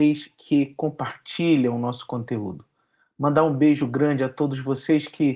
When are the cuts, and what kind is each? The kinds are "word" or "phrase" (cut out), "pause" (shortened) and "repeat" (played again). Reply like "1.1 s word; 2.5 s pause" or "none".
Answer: none